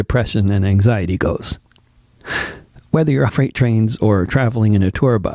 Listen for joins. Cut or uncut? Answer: cut